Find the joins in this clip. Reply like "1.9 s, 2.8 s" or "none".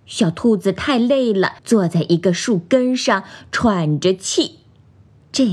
1.6 s